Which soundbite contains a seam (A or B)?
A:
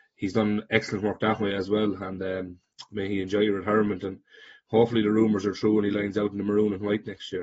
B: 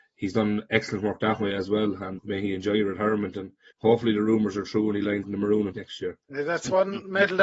B